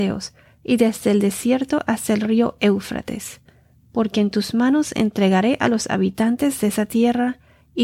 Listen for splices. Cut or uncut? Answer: uncut